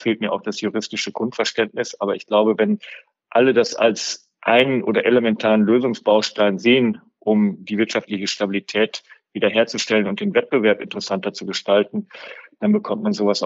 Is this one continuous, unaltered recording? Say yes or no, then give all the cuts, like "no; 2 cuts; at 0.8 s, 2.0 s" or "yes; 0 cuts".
yes; 0 cuts